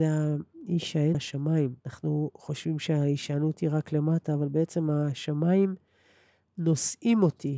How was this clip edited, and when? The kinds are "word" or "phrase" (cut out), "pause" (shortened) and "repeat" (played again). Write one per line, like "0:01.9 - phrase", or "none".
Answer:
0:01.1 - word
0:01.8 - pause